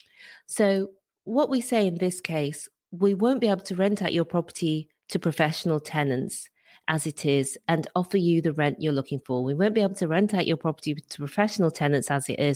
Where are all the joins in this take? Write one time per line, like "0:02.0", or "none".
none